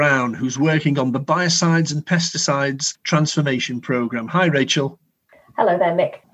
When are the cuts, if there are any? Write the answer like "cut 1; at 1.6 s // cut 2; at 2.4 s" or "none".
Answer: none